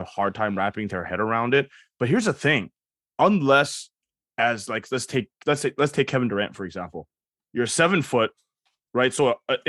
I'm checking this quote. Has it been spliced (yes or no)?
no